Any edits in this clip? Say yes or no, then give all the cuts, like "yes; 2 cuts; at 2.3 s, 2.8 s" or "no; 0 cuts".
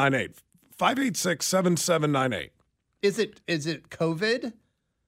no; 0 cuts